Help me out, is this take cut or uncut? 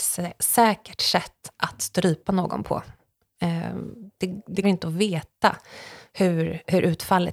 cut